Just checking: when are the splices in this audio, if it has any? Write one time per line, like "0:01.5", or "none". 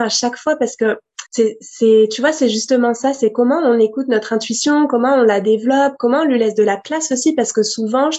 0:01.3